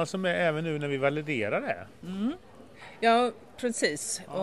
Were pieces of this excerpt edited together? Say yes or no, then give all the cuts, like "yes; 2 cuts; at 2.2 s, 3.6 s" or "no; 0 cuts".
no; 0 cuts